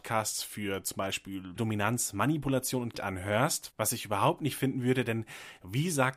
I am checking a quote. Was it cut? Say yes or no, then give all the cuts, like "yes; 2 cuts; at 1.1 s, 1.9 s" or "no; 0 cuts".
yes; 3 cuts; at 1.6 s, 2.9 s, 4.6 s